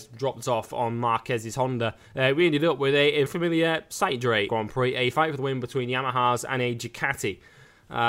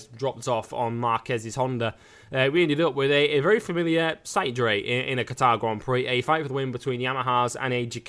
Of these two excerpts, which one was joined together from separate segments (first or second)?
first